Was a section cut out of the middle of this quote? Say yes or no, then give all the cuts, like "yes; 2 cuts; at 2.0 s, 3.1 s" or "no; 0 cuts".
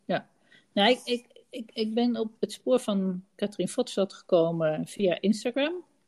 yes; 1 cut; at 2.4 s